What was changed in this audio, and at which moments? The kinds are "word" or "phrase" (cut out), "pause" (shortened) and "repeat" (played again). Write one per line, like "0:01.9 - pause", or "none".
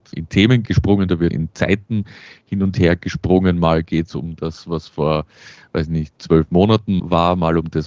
none